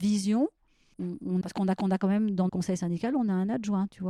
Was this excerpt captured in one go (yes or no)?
no